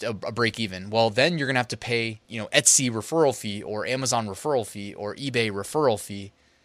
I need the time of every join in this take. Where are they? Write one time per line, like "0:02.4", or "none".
0:02.2